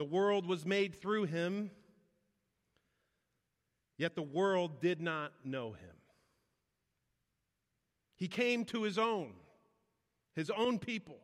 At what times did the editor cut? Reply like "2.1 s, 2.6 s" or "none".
none